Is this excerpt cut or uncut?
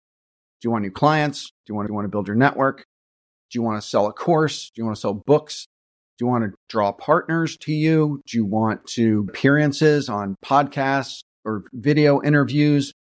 cut